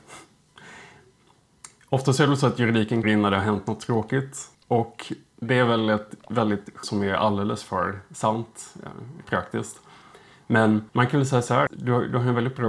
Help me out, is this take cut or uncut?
cut